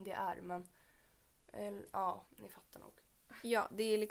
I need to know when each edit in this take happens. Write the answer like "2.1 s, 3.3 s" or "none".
2.3 s

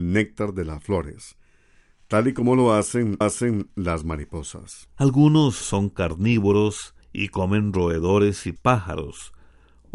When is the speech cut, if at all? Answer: 3.2 s, 5.6 s, 7.0 s, 8.6 s

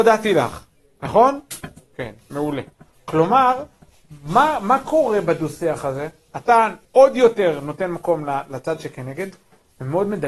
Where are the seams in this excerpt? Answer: 2.7 s, 6.8 s

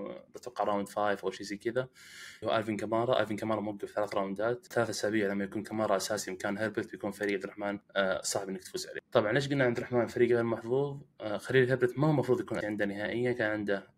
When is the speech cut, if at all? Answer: 2.4 s, 4.7 s, 12.6 s

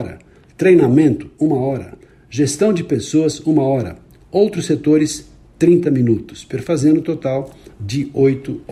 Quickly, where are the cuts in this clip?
none

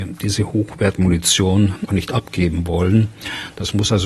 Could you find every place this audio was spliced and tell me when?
1.9 s

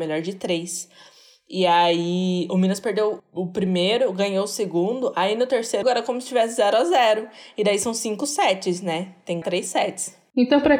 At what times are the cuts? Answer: 3.2 s, 5.8 s, 9.4 s

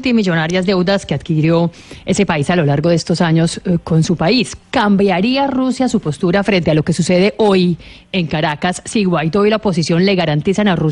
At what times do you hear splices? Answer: none

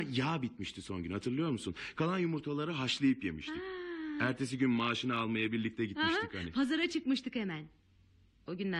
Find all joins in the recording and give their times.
none

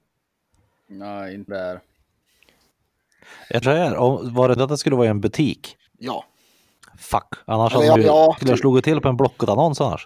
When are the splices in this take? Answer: 1.5 s, 3.6 s, 4.6 s, 5.9 s, 8.0 s, 8.4 s

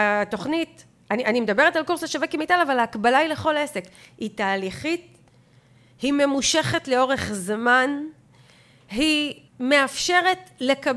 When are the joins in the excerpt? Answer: 9.5 s

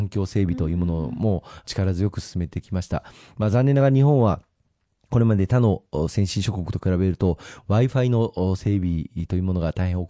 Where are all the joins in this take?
none

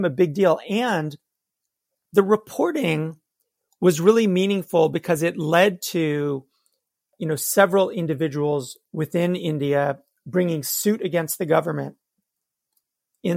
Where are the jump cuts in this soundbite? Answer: none

